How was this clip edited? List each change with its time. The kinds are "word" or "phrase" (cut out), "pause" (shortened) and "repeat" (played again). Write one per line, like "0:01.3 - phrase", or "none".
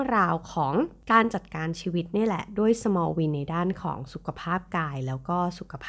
none